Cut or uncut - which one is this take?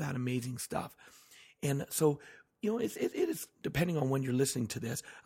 cut